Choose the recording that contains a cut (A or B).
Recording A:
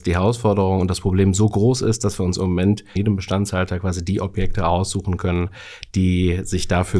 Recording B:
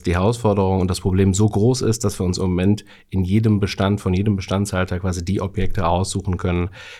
A